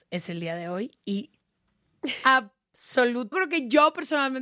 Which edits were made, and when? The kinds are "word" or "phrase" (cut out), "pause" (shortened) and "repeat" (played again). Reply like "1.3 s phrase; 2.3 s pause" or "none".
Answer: 1.4 s pause; 3.3 s word